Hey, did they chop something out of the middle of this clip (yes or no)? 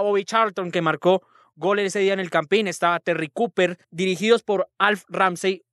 yes